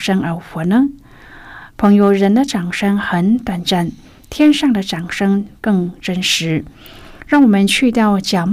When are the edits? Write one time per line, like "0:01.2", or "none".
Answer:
none